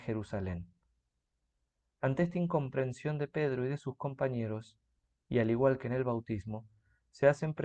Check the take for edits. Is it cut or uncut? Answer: uncut